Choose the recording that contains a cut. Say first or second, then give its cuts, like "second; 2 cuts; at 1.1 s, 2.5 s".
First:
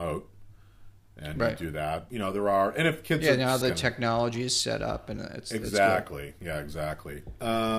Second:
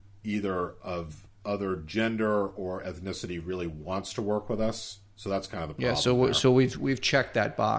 first; 2 cuts; at 2.1 s, 3.6 s